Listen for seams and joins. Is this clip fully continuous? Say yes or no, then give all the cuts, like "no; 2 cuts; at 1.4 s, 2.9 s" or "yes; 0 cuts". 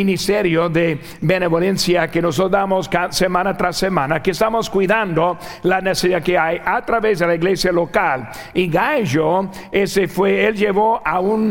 yes; 0 cuts